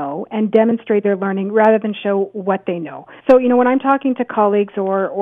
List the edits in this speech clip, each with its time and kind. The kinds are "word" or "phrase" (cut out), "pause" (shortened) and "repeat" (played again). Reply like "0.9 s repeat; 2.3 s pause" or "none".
1.0 s word; 3.2 s pause